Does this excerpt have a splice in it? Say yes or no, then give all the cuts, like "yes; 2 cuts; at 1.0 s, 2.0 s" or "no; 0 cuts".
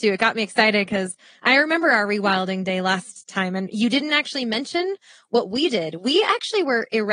no; 0 cuts